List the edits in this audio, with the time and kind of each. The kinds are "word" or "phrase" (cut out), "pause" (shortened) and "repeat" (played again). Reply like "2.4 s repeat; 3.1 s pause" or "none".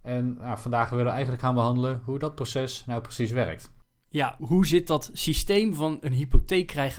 4.4 s word